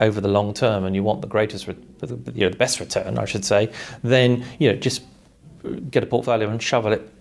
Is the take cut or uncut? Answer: uncut